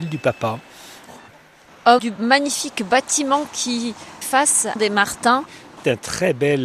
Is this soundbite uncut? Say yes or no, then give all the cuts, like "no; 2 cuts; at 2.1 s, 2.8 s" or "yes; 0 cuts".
no; 3 cuts; at 2.0 s, 4.2 s, 4.8 s